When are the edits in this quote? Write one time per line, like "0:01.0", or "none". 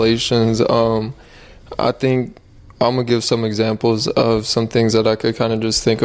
none